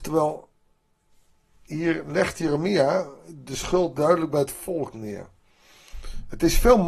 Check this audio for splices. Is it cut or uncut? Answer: uncut